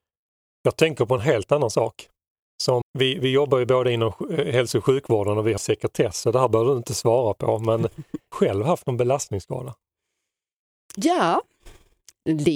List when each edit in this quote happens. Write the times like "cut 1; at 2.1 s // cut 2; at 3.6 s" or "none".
cut 1; at 2.8 s // cut 2; at 5.6 s // cut 3; at 8.3 s